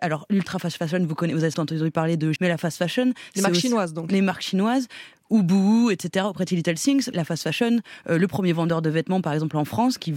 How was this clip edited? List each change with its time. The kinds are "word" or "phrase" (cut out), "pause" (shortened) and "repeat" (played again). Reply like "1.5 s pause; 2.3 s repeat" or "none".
1.5 s phrase; 2.4 s phrase; 7.1 s word